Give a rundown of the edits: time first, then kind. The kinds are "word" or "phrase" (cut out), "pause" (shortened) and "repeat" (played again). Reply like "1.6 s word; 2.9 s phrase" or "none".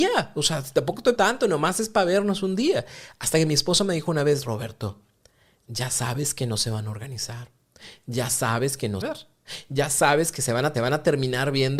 1.2 s word; 9.0 s phrase; 10.7 s repeat